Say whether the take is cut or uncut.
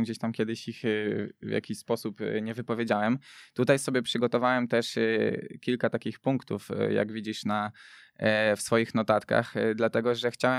uncut